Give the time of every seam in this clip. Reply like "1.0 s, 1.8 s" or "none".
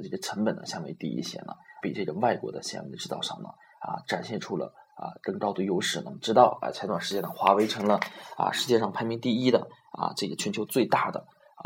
1.8 s